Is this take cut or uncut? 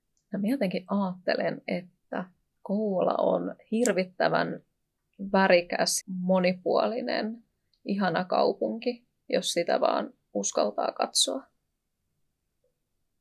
cut